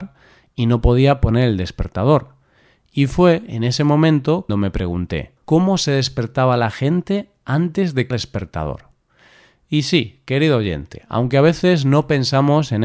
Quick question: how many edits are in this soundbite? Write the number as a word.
three